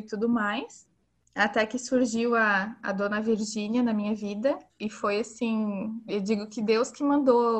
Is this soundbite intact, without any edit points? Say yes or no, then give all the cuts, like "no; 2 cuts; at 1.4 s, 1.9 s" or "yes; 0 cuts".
no; 1 cut; at 4.7 s